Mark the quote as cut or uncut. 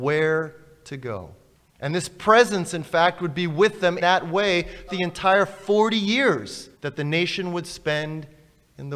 cut